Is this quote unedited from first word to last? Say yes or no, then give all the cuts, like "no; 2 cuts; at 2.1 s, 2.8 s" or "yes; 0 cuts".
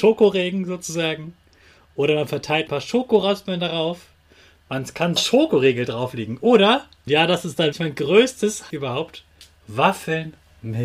no; 5 cuts; at 2.7 s, 5.2 s, 7.1 s, 7.7 s, 8.7 s